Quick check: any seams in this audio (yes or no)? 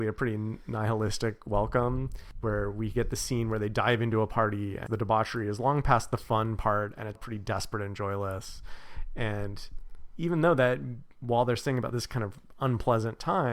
yes